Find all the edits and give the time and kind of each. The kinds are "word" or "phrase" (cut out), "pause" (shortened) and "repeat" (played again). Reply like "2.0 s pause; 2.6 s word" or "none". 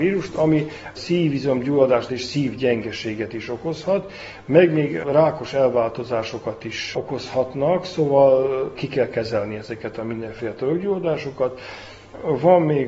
2.1 s word